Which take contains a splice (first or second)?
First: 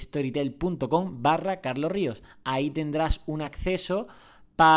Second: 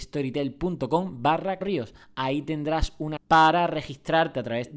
second